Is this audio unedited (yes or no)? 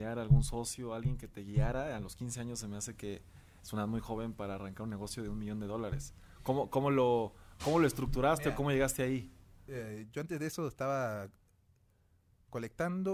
yes